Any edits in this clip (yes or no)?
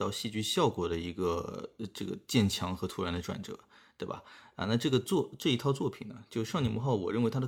no